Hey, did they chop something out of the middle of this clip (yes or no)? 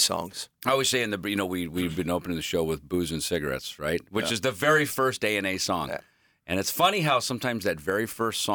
no